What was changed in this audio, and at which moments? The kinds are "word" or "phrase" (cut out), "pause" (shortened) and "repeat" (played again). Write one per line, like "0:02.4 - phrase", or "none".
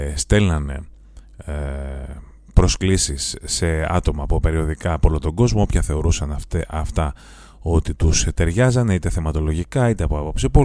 none